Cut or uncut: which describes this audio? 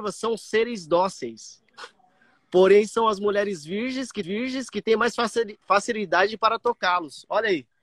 cut